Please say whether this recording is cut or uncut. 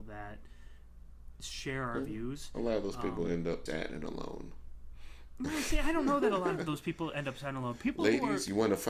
cut